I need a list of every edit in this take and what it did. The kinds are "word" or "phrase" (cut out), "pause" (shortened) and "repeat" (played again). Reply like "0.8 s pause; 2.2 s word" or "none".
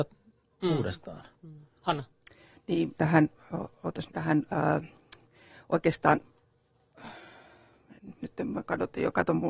2.9 s word; 4.1 s word; 8.2 s word